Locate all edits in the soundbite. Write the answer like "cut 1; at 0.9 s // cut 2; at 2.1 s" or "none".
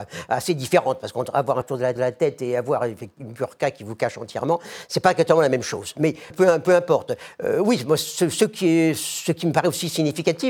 cut 1; at 1.6 s // cut 2; at 2.0 s // cut 3; at 6.3 s